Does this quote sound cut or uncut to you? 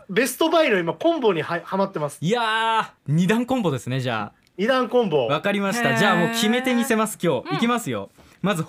cut